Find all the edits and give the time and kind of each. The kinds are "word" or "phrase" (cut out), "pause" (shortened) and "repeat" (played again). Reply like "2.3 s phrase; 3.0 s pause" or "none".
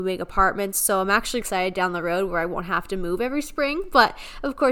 1.4 s word